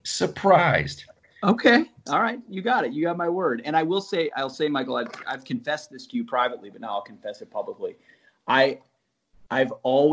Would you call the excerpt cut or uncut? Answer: uncut